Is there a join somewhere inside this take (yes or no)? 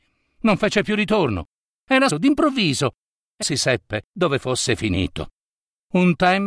yes